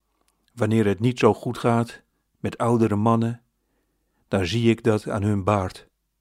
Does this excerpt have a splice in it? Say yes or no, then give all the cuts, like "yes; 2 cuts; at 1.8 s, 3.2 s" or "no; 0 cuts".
no; 0 cuts